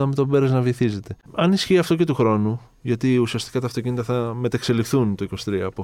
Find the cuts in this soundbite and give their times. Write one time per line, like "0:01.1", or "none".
0:01.2